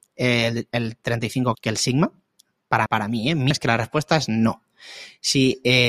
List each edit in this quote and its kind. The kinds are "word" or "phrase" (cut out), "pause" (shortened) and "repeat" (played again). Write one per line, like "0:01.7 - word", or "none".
0:01.5 - word
0:02.9 - word
0:03.5 - word

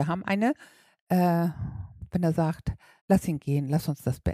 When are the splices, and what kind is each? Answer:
0:03.0 - pause

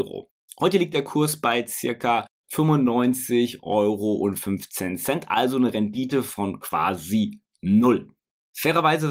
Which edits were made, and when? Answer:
none

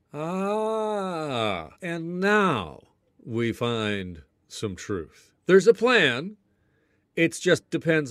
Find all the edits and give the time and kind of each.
0:01.7 - pause
0:05.4 - pause

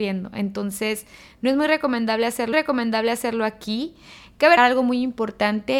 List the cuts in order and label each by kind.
0:02.5 - repeat
0:04.6 - word

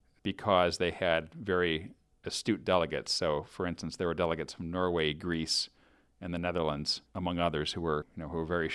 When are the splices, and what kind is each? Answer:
0:07.0 - pause

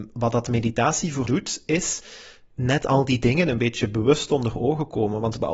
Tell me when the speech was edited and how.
0:01.3 - word

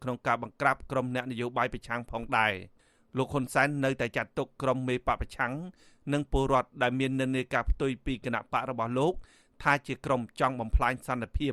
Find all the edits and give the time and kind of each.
none

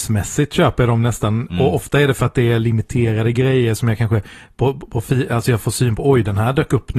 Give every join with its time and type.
none

